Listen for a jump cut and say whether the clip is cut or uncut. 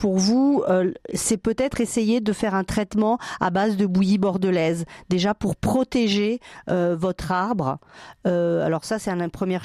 uncut